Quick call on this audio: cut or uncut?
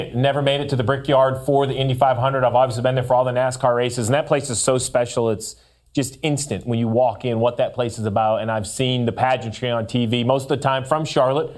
uncut